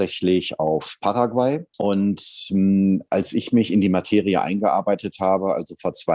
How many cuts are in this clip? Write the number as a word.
one